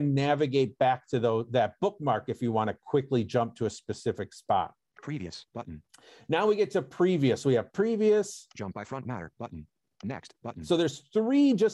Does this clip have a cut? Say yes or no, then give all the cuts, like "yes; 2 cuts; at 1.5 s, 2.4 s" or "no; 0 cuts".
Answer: no; 0 cuts